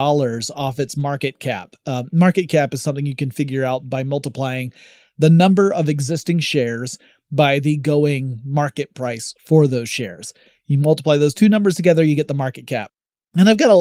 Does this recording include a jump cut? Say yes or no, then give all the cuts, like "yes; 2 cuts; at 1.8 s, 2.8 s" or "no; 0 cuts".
no; 0 cuts